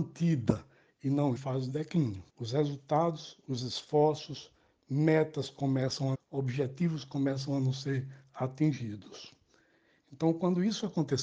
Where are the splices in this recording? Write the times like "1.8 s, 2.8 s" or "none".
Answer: 1.4 s, 2.3 s, 6.1 s